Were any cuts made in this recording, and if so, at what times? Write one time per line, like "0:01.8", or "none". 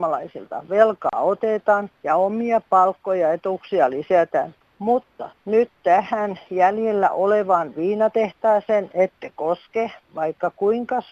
none